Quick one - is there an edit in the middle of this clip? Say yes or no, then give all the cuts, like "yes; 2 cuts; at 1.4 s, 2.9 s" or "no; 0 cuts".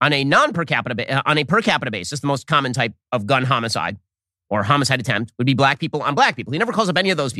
no; 0 cuts